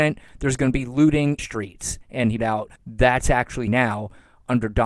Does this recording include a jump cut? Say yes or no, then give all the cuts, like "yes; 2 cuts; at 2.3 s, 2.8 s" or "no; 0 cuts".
yes; 4 cuts; at 1.4 s, 2.4 s, 2.8 s, 3.7 s